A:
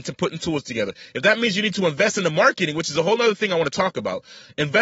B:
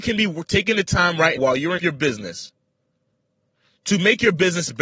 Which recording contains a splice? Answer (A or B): B